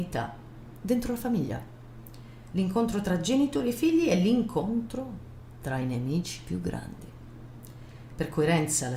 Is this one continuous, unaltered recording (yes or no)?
yes